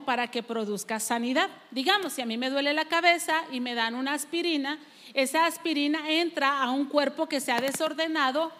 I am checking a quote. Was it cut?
no; 0 cuts

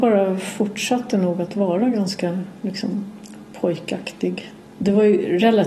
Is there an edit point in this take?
no; 0 cuts

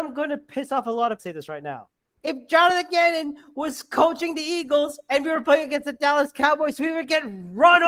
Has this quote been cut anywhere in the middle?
yes; 2 cuts; at 1.2 s, 2.0 s

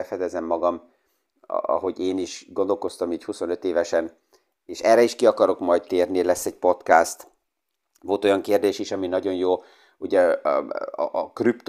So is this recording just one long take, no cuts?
yes; 0 cuts

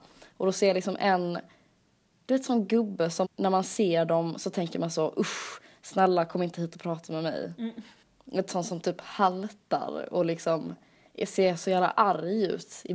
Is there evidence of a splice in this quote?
yes; 2 cuts; at 3.2 s, 8.0 s

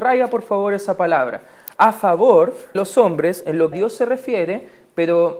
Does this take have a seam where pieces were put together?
yes; 2 cuts; at 2.7 s, 3.7 s

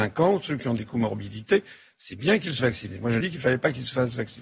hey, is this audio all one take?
no; 2 cuts; at 2.6 s, 3.2 s

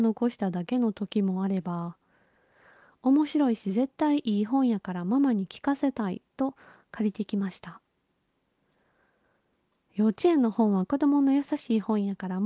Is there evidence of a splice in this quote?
no; 0 cuts

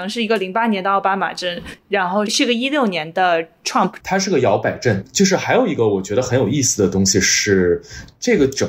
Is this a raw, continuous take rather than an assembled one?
no; 1 cut; at 4.0 s

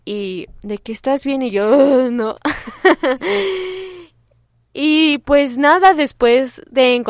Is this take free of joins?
yes; 0 cuts

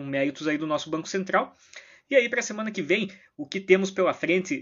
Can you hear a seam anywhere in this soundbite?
no; 0 cuts

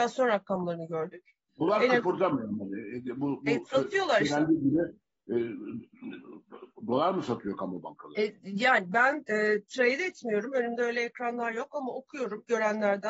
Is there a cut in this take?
no; 0 cuts

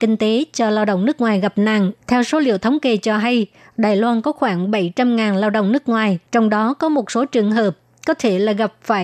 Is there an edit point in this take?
yes; 2 cuts; at 2.0 s, 6.3 s

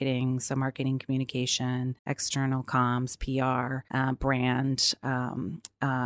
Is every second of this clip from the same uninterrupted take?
no; 2 cuts; at 2.0 s, 3.9 s

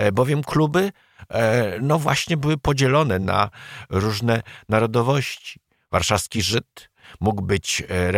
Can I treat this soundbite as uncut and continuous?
yes; 0 cuts

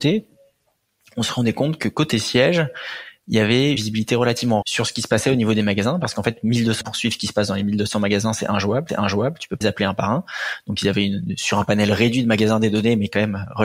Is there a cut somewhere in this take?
yes; 5 cuts; at 3.8 s, 4.6 s, 6.8 s, 8.9 s, 9.6 s

